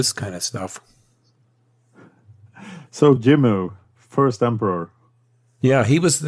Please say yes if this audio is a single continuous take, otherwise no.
yes